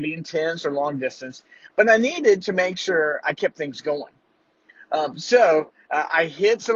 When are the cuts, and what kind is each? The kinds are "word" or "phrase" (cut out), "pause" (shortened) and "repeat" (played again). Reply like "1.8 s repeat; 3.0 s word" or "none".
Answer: none

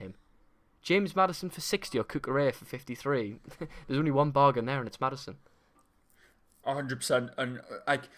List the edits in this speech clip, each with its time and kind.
none

